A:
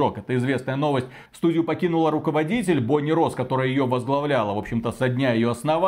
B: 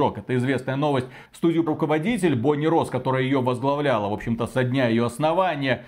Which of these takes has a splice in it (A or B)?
B